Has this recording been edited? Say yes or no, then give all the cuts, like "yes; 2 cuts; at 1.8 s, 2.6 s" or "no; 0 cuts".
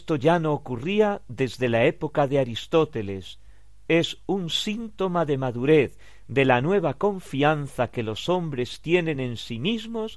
no; 0 cuts